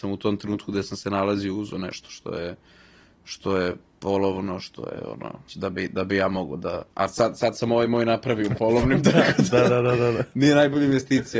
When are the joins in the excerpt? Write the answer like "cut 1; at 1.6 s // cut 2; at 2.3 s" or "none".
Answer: cut 1; at 5.5 s // cut 2; at 6.9 s